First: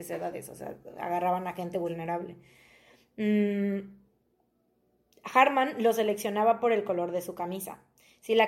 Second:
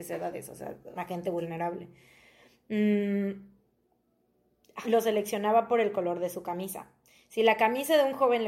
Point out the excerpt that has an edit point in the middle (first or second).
second